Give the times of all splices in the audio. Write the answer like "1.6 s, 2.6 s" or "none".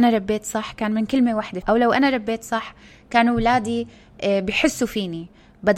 1.6 s